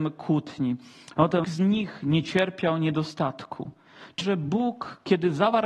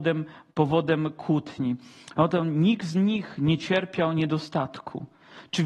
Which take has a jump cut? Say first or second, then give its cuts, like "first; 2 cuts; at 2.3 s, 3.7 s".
first; 2 cuts; at 1.4 s, 4.2 s